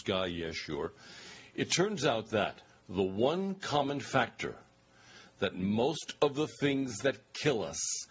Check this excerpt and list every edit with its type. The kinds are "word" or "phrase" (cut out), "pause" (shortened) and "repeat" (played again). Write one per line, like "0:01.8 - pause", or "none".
0:02.7 - pause